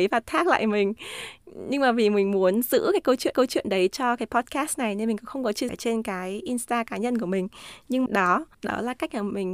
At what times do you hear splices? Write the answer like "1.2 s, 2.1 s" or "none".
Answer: 3.3 s, 5.7 s, 8.1 s, 8.5 s